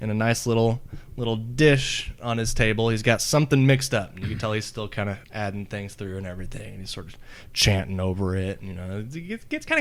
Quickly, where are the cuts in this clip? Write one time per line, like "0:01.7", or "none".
0:05.2